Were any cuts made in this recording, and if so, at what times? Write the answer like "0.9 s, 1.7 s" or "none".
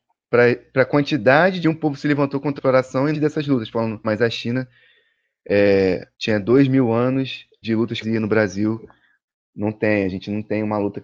1.6 s, 2.6 s, 3.1 s, 4.0 s, 6.1 s, 7.6 s, 8.0 s